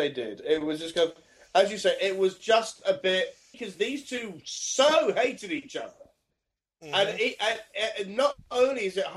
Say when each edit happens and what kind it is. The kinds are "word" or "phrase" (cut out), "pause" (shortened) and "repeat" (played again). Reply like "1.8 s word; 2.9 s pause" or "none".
3.5 s word